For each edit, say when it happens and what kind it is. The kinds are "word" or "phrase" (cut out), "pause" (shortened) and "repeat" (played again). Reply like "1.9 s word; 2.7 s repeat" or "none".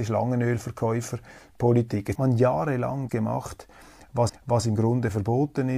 2.1 s word; 3.1 s word; 4.3 s repeat

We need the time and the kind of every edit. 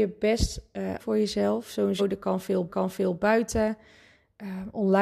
1.0 s word; 2.0 s word; 2.7 s repeat

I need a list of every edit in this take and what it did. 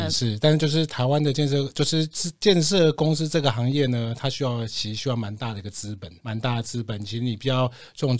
6.2 s word

